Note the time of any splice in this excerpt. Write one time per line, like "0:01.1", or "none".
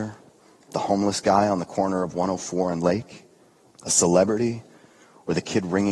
none